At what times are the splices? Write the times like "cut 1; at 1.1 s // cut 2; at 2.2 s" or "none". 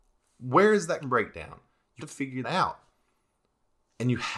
cut 1; at 1.0 s // cut 2; at 2.0 s // cut 3; at 2.4 s